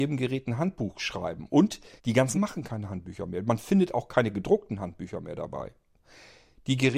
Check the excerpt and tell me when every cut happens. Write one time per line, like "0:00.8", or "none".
0:02.0
0:02.3